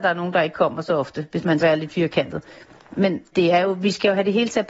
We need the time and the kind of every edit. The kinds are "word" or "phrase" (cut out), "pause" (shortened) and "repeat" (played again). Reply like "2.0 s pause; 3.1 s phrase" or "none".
1.6 s word; 3.3 s word